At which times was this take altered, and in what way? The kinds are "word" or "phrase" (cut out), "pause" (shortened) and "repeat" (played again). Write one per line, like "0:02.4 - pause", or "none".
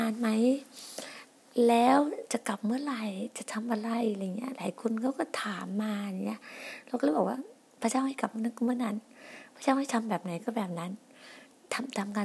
none